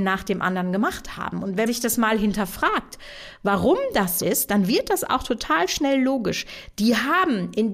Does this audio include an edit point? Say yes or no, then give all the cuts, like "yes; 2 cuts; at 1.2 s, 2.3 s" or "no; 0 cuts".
yes; 2 cuts; at 1.7 s, 4.2 s